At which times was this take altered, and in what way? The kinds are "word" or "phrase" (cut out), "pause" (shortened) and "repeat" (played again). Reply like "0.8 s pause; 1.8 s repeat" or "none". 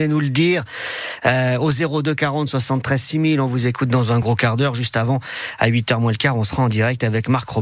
none